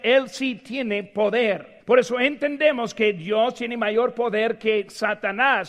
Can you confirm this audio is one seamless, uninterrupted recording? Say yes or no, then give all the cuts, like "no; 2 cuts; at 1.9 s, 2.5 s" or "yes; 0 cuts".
no; 1 cut; at 1.8 s